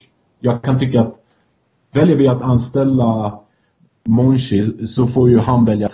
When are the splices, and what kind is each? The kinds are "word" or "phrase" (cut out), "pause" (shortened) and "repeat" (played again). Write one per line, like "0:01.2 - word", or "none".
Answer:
none